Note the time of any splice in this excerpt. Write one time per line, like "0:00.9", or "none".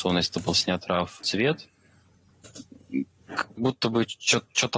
0:01.2
0:03.6